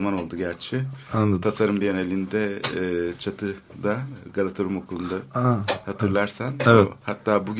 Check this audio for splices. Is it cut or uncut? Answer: uncut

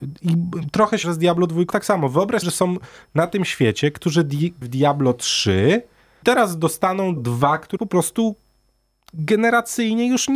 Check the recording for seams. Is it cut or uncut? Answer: cut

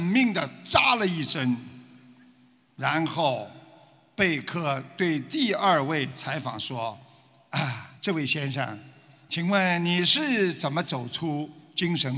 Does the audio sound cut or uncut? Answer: cut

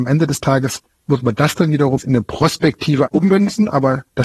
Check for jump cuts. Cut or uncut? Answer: cut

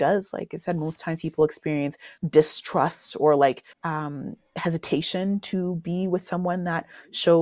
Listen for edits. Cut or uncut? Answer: cut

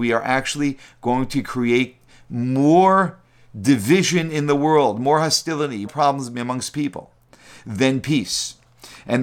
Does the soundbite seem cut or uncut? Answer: cut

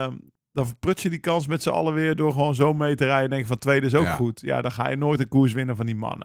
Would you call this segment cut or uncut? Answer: uncut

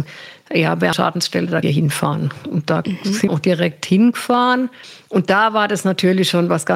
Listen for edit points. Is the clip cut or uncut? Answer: cut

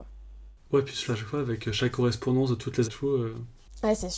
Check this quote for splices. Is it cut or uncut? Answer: cut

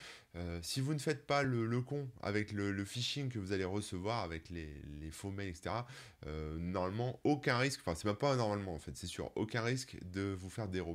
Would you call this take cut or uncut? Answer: uncut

